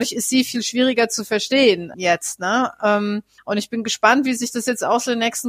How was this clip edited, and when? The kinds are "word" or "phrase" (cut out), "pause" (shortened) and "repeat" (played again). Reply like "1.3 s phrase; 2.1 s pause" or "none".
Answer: 1.9 s word; 3.4 s pause